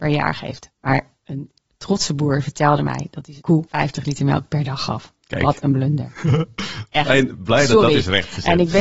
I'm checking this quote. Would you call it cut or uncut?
uncut